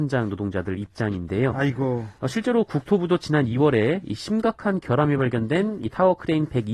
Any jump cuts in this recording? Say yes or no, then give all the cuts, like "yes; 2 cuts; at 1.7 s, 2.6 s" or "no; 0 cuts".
no; 0 cuts